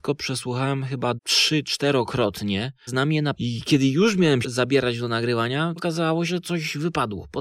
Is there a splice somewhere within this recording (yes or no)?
yes